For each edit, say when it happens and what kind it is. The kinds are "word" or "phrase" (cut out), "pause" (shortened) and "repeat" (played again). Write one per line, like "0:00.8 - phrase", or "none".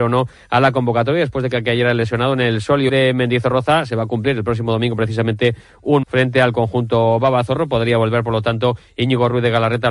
0:02.9 - phrase
0:06.0 - phrase